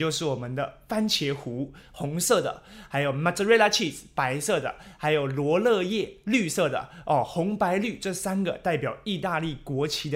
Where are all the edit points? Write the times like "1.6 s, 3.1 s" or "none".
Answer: none